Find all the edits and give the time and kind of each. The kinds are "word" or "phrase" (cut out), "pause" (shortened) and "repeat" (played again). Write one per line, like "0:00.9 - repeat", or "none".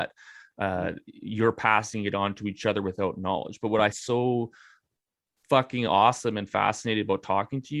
0:03.9 - word